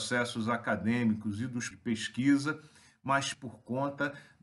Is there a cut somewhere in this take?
yes; 2 cuts; at 1.7 s, 3.3 s

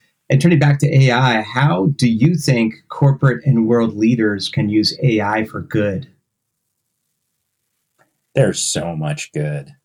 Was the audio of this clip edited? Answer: no; 0 cuts

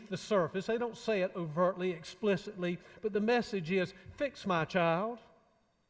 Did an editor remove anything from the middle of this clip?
no; 0 cuts

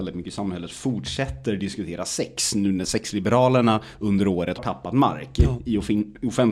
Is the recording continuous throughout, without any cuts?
no; 1 cut; at 4.6 s

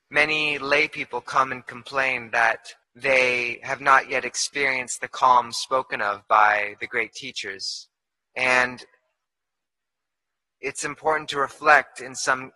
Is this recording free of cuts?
no; 2 cuts; at 2.8 s, 8.1 s

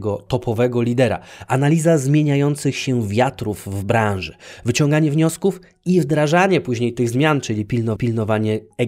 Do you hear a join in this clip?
yes; 1 cut; at 8.0 s

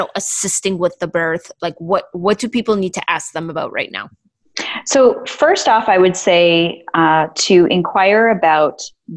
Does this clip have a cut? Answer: no; 0 cuts

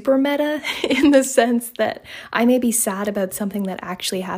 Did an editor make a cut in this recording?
no; 0 cuts

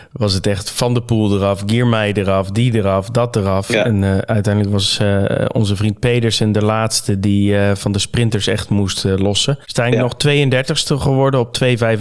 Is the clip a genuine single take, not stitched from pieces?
no; 1 cut; at 9.6 s

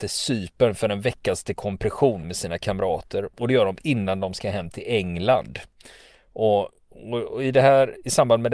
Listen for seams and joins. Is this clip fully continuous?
yes; 0 cuts

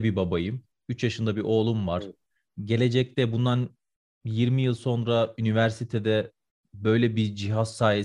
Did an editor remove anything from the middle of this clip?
no; 0 cuts

